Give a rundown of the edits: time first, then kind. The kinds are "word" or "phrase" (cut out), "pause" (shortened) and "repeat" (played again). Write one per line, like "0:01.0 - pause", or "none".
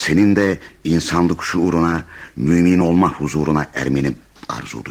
none